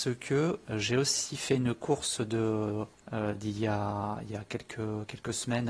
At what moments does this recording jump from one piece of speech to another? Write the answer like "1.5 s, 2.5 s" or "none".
2.9 s